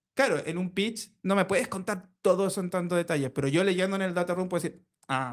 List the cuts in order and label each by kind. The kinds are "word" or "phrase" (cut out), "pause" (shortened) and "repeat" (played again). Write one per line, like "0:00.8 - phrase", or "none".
none